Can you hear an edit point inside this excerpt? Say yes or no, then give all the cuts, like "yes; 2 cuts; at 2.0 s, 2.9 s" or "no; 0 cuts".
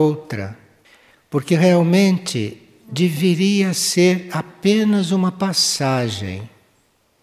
no; 0 cuts